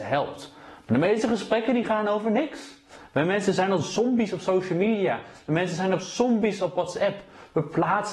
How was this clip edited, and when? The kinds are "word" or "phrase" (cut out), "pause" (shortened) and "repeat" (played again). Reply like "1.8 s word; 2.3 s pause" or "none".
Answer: none